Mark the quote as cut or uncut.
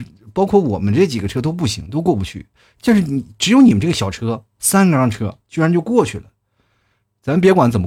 uncut